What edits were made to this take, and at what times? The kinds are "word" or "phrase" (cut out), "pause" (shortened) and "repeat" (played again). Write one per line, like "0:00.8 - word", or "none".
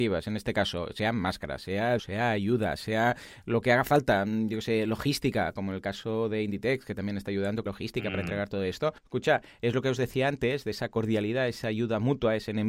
0:02.0 - word
0:07.7 - word
0:09.0 - pause